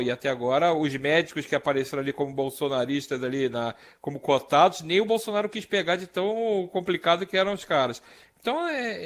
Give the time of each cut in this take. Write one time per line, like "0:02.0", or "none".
none